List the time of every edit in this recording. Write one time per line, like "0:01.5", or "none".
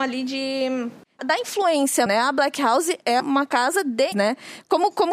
0:01.2
0:02.1
0:03.2
0:04.1